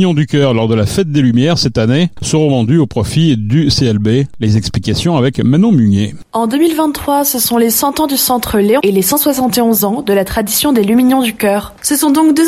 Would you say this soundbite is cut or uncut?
cut